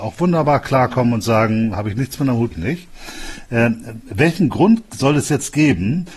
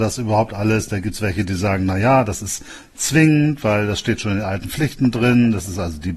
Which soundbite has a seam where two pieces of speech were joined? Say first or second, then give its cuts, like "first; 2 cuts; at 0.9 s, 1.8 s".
first; 1 cut; at 2.5 s